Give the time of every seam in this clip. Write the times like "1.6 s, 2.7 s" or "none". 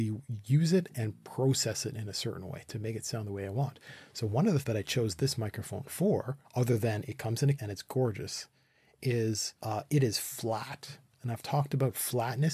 4.6 s, 6.4 s, 7.5 s, 9.6 s